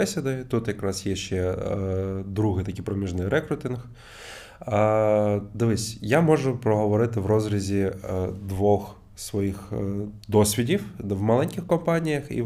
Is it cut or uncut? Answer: cut